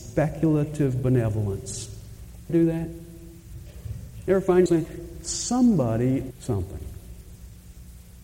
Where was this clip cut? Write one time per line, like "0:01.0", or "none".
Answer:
0:02.5
0:04.7
0:06.3